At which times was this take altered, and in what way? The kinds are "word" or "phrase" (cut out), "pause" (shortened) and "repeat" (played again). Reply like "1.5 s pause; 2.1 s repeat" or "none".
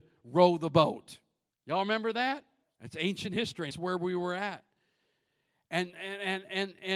1.5 s pause; 2.6 s pause; 3.7 s phrase